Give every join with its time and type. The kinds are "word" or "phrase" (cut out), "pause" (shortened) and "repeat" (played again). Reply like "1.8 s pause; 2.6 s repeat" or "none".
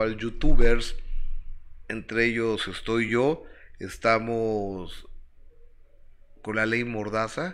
none